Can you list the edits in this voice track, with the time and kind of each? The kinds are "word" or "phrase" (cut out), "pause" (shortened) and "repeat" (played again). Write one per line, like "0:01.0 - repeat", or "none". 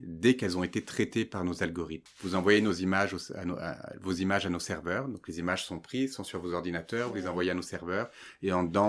none